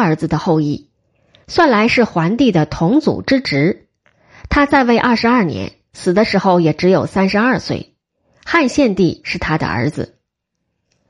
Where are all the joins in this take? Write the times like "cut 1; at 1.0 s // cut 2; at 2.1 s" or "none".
none